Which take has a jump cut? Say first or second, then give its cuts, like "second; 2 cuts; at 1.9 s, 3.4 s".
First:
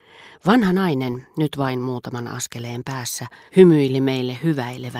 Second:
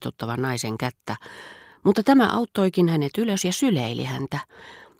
first; 1 cut; at 3.5 s